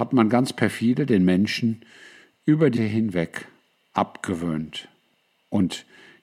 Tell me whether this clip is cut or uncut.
cut